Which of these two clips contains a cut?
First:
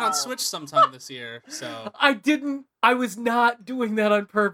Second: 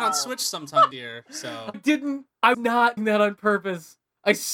second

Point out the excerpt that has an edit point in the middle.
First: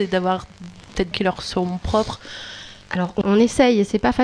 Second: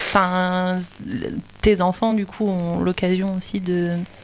first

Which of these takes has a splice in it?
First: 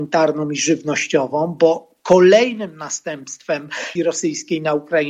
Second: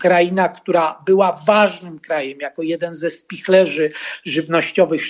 first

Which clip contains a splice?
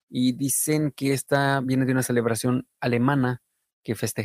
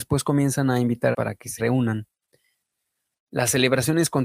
second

